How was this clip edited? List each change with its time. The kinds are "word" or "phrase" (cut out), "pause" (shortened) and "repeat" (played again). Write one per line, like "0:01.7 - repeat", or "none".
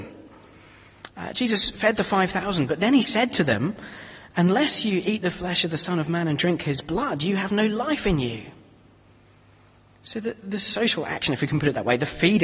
none

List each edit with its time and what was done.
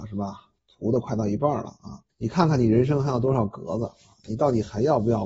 0:02.1 - pause

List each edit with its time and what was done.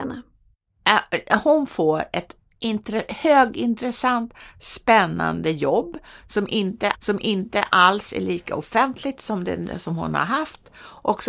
0:06.9 - repeat

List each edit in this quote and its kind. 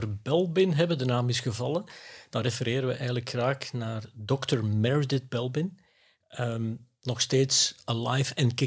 none

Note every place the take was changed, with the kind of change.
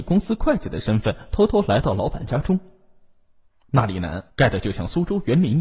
0:04.3 - pause

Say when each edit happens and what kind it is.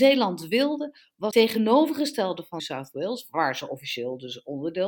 0:01.3 - word
0:02.6 - word

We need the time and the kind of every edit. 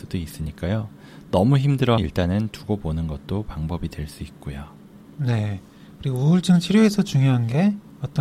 0:02.0 - word

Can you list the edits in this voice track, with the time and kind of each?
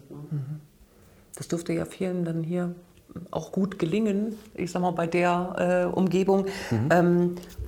none

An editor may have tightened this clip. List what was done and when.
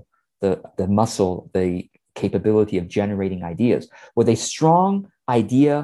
none

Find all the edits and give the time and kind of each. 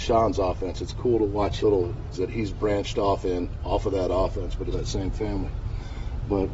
0:01.6 - word
0:02.1 - word
0:04.7 - word

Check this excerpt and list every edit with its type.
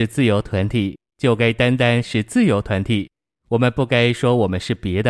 none

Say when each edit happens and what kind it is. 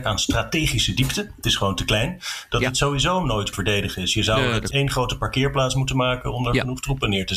0:03.5 - phrase

